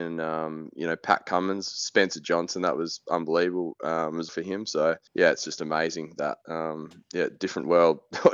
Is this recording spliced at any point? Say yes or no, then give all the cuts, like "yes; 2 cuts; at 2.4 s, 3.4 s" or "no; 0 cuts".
yes; 2 cuts; at 4.3 s, 5.1 s